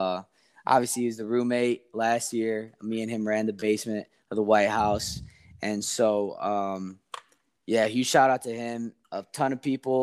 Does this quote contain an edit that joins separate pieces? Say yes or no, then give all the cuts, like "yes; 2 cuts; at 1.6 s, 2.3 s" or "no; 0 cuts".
no; 0 cuts